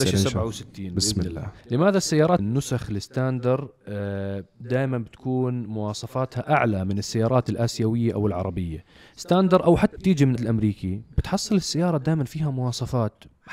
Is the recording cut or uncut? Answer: cut